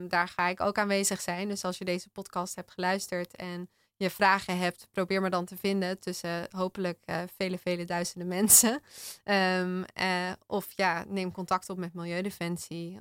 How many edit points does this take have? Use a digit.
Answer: 0